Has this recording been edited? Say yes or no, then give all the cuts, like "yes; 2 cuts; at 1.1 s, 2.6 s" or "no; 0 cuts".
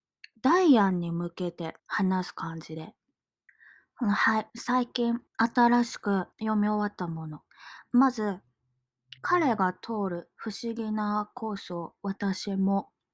yes; 6 cuts; at 1.8 s, 3.5 s, 4.5 s, 5.3 s, 6.3 s, 9.2 s